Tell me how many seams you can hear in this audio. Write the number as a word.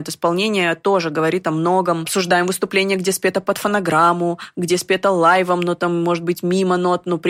zero